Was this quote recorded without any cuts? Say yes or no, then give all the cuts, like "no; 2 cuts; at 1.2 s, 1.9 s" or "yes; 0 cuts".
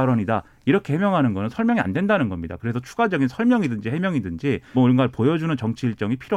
no; 1 cut; at 4.7 s